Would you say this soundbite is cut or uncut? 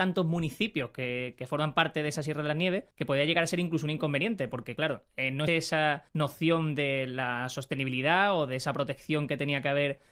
cut